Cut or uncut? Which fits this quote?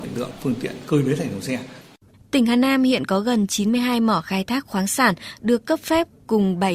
uncut